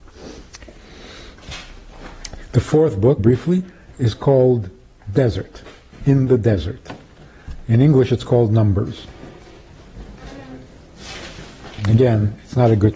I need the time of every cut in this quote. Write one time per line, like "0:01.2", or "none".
0:03.2